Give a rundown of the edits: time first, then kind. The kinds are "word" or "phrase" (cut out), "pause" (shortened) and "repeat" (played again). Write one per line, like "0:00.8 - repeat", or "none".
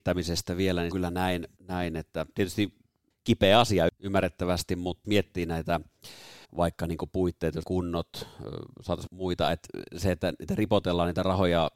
0:00.9 - phrase
0:01.6 - pause
0:03.1 - pause
0:03.9 - word
0:05.0 - word
0:06.5 - pause
0:07.6 - word
0:09.1 - phrase